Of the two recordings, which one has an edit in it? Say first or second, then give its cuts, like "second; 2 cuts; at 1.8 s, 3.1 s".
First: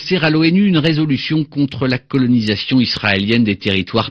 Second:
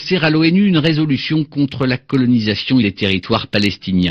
second; 1 cut; at 2.8 s